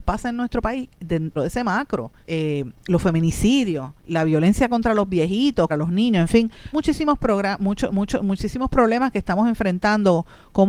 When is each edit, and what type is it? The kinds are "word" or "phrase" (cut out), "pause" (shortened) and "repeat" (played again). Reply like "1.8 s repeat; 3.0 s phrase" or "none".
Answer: 1.4 s word; 2.2 s pause; 4.0 s pause; 5.7 s word; 6.7 s word; 7.9 s repeat

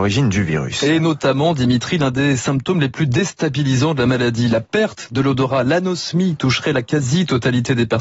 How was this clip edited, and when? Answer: none

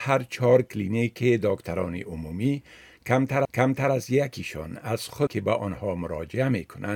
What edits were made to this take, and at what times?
3.4 s repeat; 5.3 s word

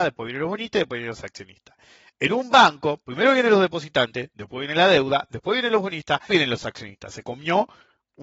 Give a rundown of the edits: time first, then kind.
6.3 s phrase

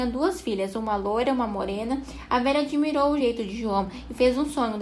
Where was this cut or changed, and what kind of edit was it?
none

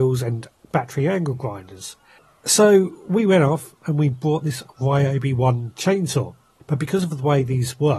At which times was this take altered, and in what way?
none

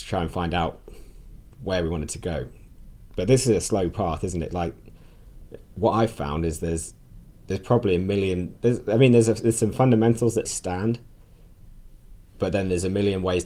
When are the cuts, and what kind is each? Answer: 10.4 s word

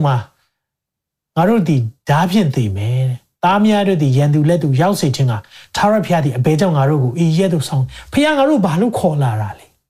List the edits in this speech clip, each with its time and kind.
none

